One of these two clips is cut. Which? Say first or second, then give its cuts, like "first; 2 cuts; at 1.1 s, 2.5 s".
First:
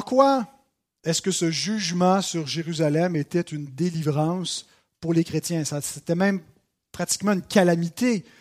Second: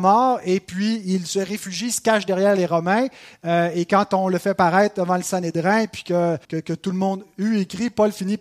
second; 1 cut; at 6.4 s